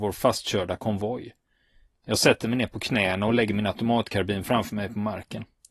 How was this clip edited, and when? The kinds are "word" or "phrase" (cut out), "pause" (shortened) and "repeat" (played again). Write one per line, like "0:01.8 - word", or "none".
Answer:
none